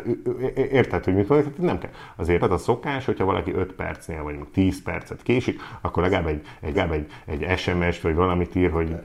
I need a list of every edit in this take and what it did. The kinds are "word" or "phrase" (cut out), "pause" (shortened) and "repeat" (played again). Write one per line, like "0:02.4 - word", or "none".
0:02.4 - word
0:06.7 - repeat